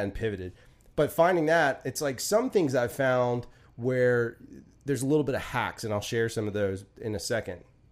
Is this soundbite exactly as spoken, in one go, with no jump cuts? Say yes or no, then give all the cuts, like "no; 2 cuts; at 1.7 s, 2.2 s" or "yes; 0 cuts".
yes; 0 cuts